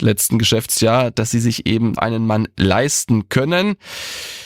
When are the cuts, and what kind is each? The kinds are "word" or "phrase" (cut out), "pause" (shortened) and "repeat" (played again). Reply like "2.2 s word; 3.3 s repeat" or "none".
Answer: 2.0 s word